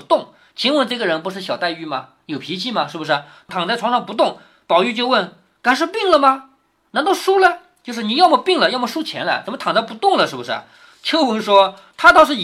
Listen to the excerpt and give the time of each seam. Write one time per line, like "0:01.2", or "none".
none